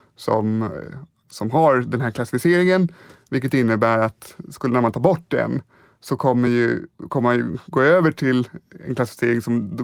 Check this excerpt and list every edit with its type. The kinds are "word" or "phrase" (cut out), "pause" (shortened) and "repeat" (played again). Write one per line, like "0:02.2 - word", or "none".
none

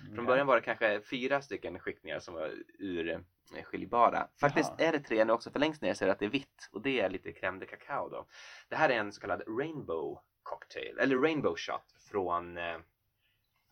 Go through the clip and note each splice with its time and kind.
none

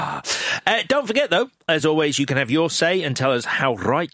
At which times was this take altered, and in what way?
none

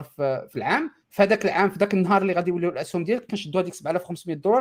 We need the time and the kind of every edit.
0:01.0 - pause

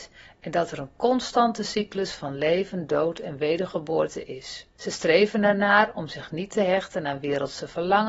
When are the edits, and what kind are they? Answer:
0:04.7 - pause

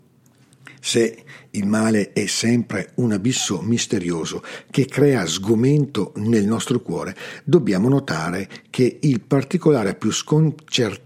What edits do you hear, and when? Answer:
none

